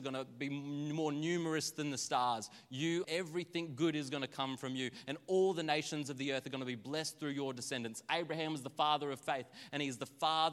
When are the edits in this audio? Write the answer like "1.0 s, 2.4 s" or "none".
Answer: 3.0 s